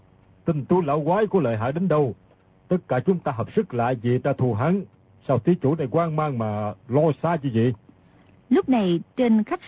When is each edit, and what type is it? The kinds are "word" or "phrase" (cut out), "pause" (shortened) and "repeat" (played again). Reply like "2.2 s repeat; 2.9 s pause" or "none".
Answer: 4.2 s word